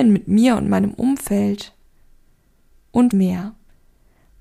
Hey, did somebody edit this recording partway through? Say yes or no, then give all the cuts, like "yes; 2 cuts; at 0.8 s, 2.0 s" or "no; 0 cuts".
yes; 1 cut; at 3.1 s